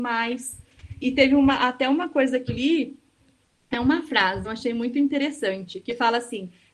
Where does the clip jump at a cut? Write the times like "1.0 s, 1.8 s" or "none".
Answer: 1.0 s, 2.5 s, 4.4 s

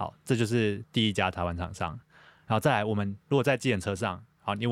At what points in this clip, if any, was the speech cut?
none

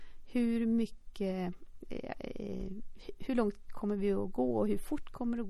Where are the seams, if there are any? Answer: none

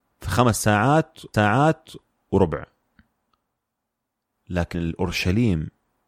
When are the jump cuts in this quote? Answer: 1.3 s, 4.7 s

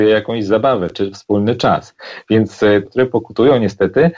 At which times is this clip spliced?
2.9 s

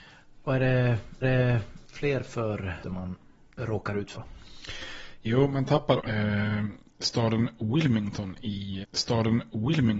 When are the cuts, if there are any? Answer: 1.2 s, 2.8 s, 3.6 s, 4.2 s, 6.0 s, 8.8 s

